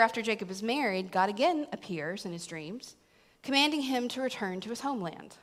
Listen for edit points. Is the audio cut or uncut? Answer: uncut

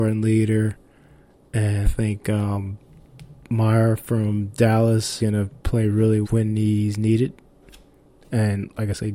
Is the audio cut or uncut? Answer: cut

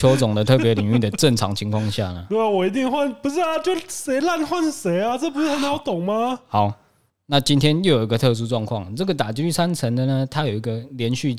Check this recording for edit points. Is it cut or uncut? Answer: uncut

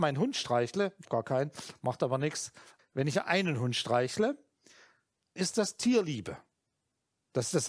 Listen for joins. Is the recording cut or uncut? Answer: cut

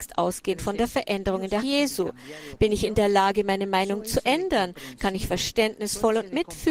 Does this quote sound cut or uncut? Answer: cut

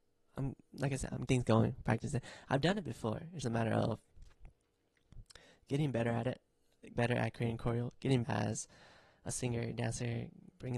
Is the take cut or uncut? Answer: cut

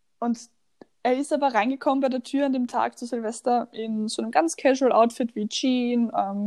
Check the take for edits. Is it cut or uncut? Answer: uncut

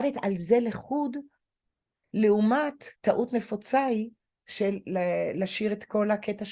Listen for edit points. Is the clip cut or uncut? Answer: cut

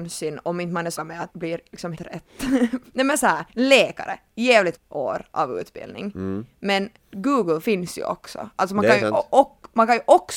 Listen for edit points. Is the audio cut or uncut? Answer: cut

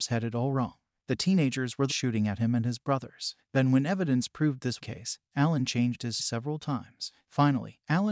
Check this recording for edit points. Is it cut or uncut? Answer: cut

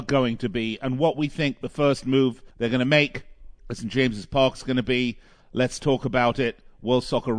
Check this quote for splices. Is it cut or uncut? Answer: cut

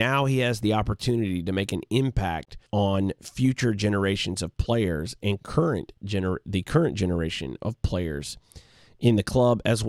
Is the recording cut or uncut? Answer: cut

